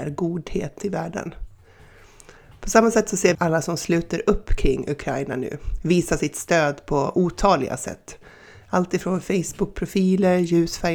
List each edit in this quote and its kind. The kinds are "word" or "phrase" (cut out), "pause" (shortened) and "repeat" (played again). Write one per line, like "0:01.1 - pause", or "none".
0:03.3 - word